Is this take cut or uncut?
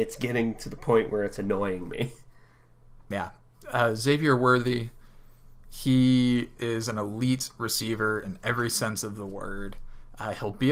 uncut